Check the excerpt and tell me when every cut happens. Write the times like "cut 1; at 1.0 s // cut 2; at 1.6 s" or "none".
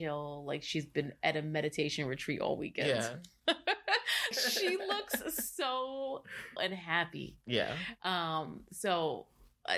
cut 1; at 4.3 s // cut 2; at 6.6 s